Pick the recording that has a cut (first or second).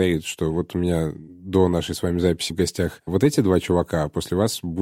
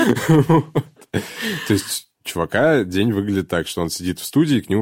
first